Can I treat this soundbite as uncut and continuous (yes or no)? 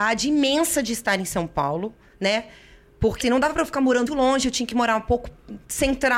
no